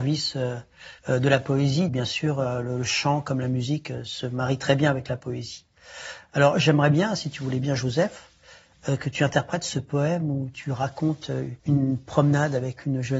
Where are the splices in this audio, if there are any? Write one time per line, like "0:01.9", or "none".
0:01.0
0:01.9
0:11.6